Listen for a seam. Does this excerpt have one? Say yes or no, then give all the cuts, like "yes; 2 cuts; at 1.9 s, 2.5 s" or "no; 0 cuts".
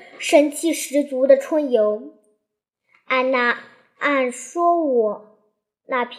no; 0 cuts